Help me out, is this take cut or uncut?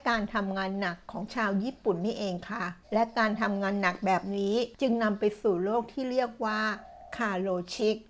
cut